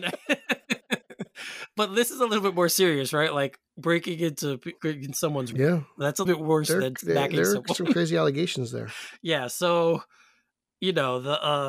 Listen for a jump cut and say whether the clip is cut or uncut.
cut